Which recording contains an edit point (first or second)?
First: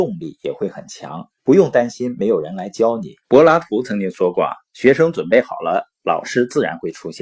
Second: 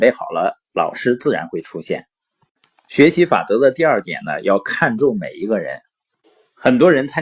first